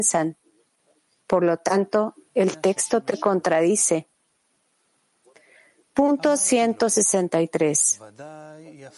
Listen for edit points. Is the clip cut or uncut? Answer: uncut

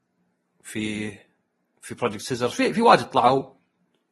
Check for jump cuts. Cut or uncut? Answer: uncut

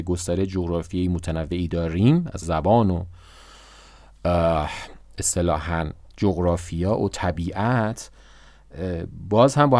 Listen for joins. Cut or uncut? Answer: cut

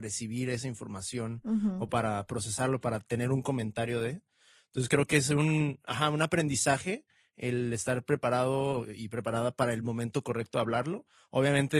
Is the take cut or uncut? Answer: uncut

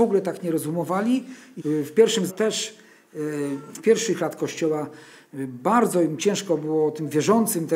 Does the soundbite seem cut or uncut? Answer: cut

